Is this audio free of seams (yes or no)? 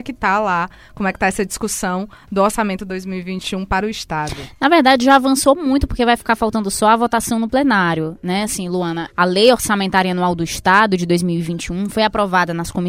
yes